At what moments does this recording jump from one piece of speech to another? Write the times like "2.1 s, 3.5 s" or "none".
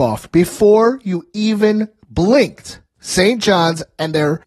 none